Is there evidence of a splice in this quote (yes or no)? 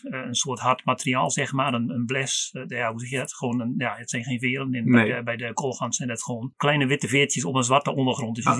no